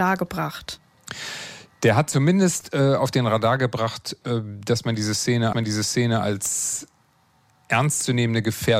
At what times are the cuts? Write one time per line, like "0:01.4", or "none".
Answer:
0:05.5